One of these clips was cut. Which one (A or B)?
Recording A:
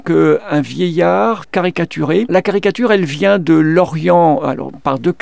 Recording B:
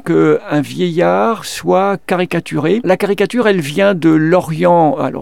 A